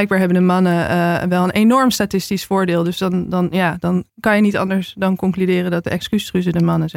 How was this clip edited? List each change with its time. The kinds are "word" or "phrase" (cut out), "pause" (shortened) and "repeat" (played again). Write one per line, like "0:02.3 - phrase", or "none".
0:04.1 - pause